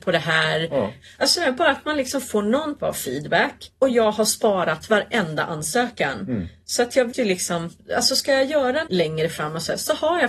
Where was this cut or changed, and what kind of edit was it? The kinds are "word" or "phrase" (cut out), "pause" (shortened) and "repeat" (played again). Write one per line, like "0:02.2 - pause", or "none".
0:02.8 - word
0:07.1 - word
0:08.9 - word